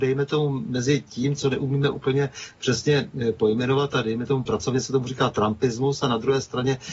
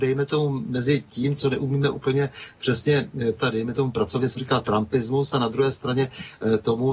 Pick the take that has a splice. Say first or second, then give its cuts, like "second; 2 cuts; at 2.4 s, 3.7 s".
second; 2 cuts; at 3.4 s, 4.4 s